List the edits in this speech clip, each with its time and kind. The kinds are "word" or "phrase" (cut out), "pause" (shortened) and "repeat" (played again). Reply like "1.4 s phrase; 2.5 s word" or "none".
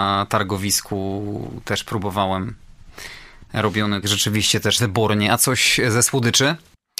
4.0 s phrase; 4.8 s word